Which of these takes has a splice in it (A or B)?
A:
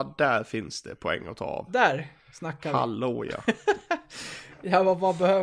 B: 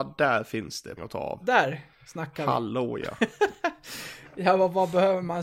B